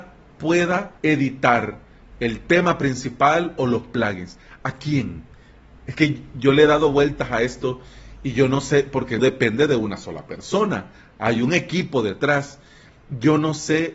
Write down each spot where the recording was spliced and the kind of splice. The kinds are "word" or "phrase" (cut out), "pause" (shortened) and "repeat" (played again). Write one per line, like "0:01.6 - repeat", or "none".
0:01.0 - pause
0:09.2 - word